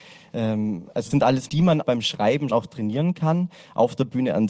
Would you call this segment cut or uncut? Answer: cut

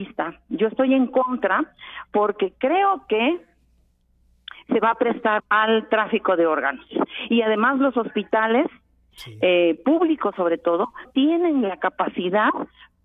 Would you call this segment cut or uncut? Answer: cut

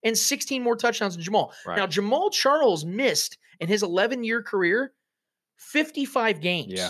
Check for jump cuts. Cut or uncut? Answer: uncut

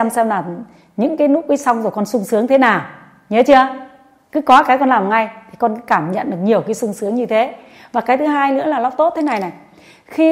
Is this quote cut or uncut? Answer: uncut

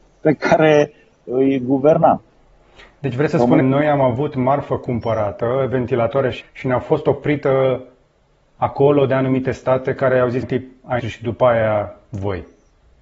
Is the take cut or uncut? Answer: cut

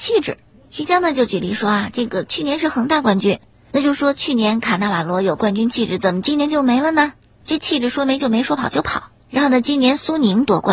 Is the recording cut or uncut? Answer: uncut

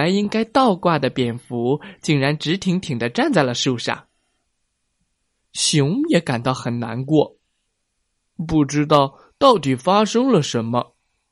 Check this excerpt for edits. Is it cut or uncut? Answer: uncut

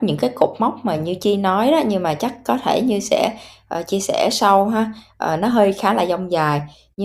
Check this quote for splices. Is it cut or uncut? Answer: uncut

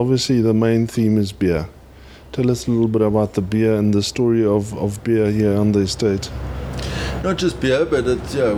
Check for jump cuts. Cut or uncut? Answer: uncut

